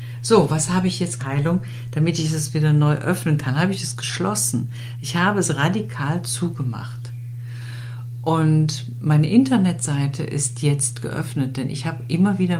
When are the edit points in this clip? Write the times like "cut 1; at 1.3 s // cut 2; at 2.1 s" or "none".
cut 1; at 1.2 s